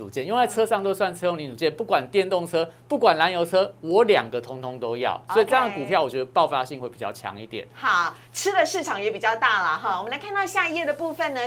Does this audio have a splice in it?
no; 0 cuts

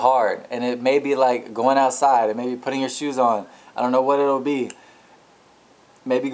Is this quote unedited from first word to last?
yes; 0 cuts

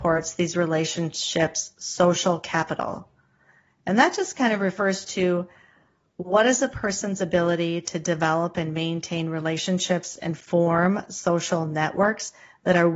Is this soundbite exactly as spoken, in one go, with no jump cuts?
yes; 0 cuts

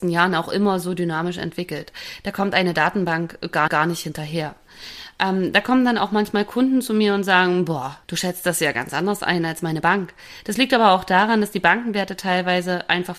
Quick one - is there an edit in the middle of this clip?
yes; 2 cuts; at 3.7 s, 8.0 s

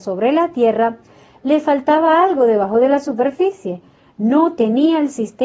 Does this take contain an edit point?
no; 0 cuts

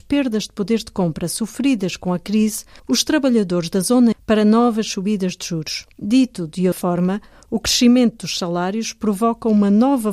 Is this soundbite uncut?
no; 4 cuts; at 2.8 s, 4.1 s, 5.9 s, 6.7 s

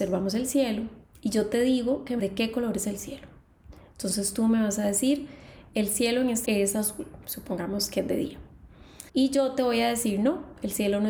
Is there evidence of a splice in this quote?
yes; 4 cuts; at 1.0 s, 2.2 s, 6.5 s, 9.1 s

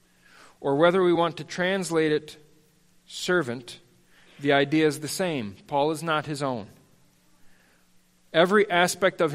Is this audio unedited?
yes; 0 cuts

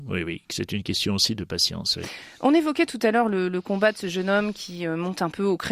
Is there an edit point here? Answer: no; 0 cuts

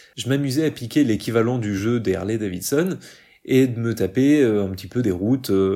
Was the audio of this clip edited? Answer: no; 0 cuts

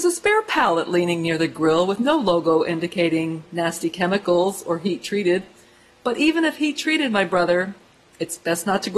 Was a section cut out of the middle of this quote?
no; 0 cuts

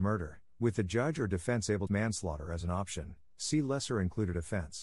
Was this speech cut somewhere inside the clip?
yes; 1 cut; at 1.9 s

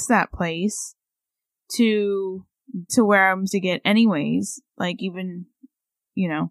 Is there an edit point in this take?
yes; 2 cuts; at 2.9 s, 3.5 s

